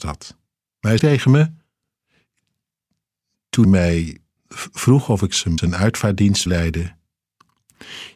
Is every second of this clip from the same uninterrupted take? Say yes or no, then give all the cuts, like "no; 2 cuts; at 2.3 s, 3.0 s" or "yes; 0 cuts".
no; 5 cuts; at 1.0 s, 3.6 s, 4.4 s, 5.6 s, 6.5 s